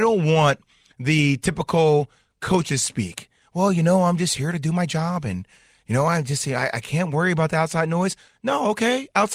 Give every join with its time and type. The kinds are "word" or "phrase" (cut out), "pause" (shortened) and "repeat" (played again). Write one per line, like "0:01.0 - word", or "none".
none